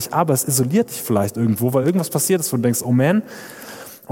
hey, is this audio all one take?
yes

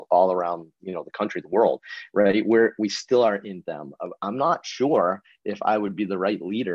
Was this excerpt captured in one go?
no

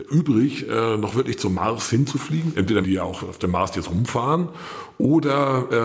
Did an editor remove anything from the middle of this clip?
yes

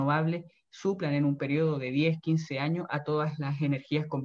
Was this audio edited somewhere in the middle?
no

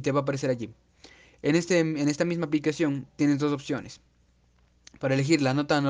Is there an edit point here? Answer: no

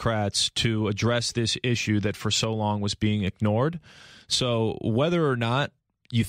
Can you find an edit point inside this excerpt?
no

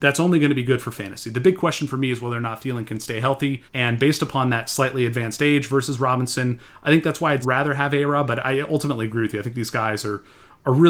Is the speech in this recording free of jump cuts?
no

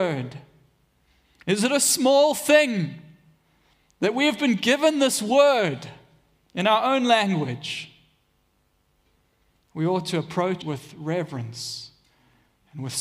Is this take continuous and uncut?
no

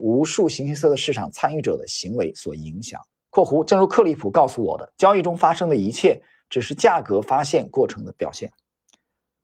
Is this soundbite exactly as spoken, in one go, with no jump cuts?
no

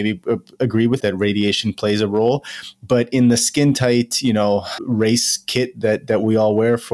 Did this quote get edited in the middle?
yes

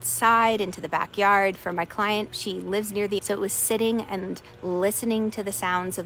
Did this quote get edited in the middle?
yes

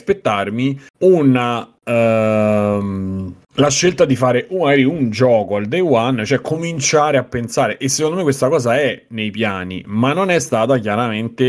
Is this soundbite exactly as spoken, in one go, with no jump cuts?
yes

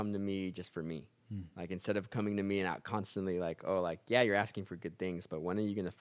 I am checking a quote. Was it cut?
yes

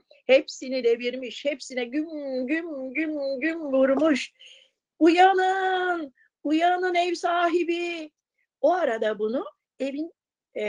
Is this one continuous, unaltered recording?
yes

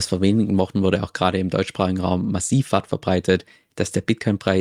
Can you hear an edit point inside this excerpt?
no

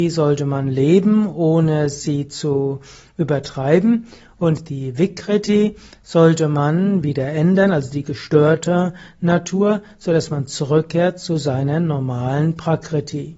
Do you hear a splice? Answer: no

